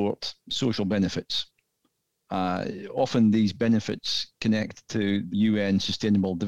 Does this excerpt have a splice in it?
yes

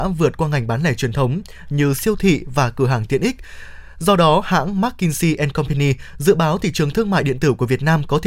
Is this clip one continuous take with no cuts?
yes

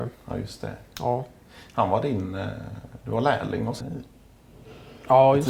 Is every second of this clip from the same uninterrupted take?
no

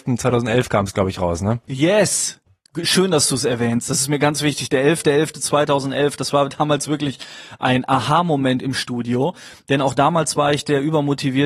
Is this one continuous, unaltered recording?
yes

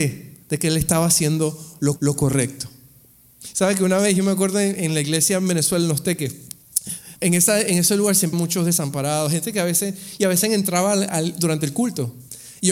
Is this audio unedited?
no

